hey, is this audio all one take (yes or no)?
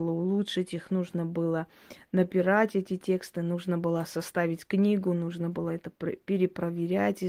yes